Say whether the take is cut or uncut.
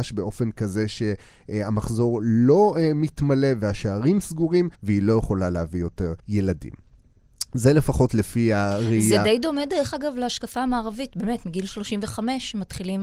cut